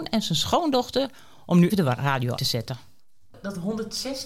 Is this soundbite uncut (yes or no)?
no